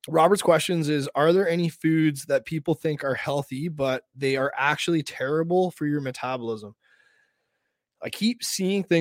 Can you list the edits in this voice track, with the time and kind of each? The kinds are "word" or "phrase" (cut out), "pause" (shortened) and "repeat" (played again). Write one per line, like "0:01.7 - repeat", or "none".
none